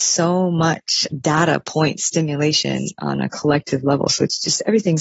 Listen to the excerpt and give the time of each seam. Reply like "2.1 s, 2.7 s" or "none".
none